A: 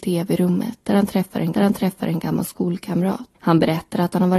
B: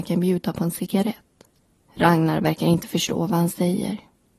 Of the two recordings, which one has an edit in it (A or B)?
A